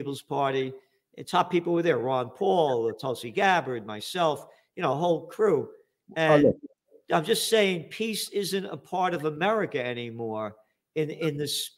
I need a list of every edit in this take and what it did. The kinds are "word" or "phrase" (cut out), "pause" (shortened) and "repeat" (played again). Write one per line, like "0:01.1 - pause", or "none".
none